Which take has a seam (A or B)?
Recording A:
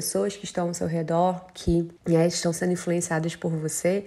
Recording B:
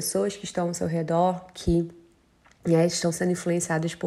A